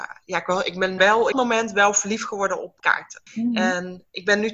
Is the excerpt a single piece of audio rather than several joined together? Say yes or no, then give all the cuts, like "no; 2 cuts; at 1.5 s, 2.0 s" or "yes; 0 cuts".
no; 4 cuts; at 1.0 s, 1.3 s, 2.8 s, 3.3 s